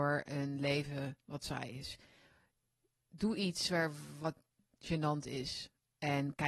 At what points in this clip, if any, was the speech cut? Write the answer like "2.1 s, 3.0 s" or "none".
none